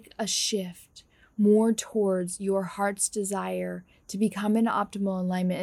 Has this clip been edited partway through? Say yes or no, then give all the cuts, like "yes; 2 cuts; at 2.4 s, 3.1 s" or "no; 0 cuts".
no; 0 cuts